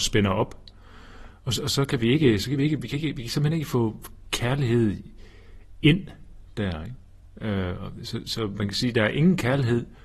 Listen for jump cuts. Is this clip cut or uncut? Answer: uncut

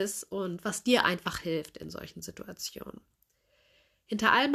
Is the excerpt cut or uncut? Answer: uncut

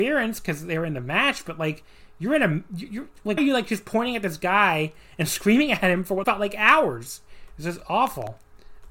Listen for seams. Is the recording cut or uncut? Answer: cut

